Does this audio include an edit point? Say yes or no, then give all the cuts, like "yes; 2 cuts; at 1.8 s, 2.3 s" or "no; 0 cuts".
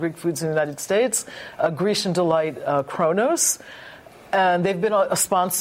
no; 0 cuts